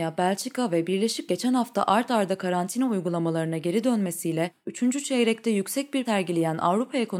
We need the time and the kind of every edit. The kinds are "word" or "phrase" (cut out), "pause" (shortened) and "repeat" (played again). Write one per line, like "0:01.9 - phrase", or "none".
0:01.3 - word
0:06.1 - word